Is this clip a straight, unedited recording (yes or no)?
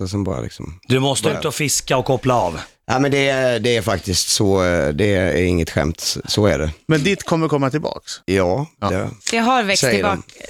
no